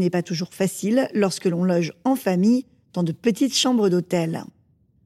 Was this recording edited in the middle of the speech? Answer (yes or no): no